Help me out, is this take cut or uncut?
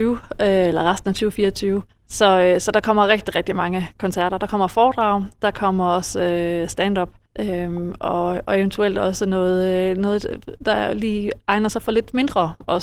cut